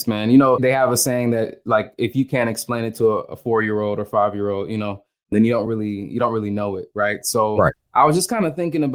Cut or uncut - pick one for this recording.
uncut